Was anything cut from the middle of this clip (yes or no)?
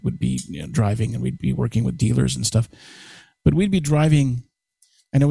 no